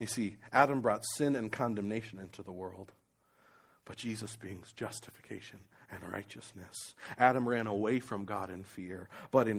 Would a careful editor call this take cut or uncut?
uncut